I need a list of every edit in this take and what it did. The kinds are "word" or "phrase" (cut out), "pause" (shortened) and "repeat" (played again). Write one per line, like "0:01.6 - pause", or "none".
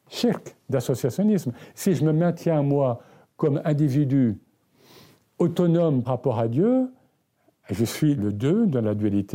0:06.0 - word
0:08.2 - word

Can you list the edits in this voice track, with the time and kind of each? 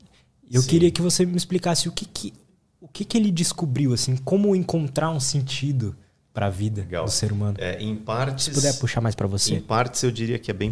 none

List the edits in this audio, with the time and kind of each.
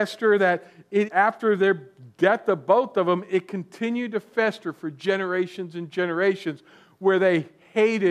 0:01.1 - word

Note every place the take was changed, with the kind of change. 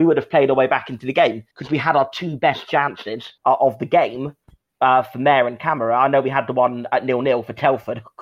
0:01.5 - pause
0:03.4 - pause

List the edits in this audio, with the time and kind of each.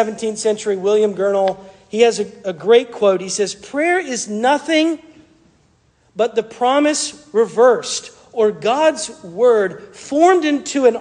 none

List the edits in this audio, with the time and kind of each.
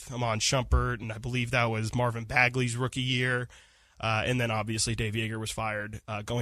none

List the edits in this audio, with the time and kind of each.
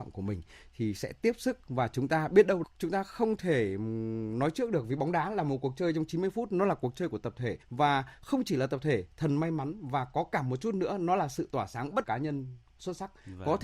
0:02.6 - word
0:07.6 - pause
0:12.0 - phrase

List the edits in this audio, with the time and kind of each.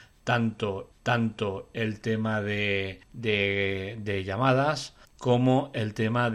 0:00.9 - repeat
0:03.0 - pause
0:05.0 - pause

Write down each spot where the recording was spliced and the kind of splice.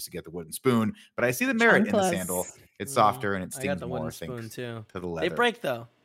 none

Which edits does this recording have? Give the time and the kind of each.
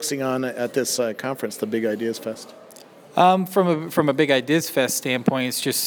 none

